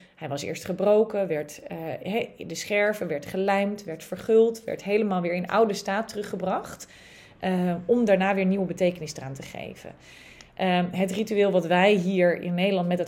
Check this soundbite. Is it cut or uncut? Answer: uncut